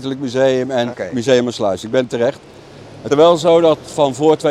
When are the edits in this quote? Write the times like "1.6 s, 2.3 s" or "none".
0.9 s, 2.1 s, 3.1 s